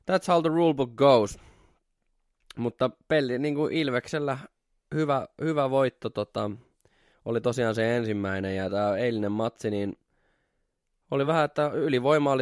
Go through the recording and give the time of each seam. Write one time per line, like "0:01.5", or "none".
none